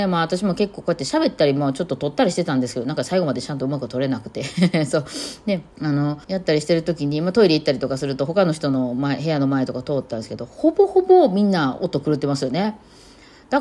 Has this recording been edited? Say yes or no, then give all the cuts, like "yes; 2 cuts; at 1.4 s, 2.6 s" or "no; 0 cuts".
yes; 2 cuts; at 5.7 s, 6.2 s